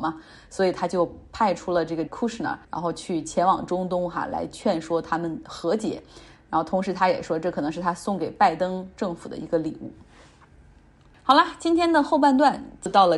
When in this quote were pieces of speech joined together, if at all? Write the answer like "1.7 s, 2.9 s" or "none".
2.1 s, 2.6 s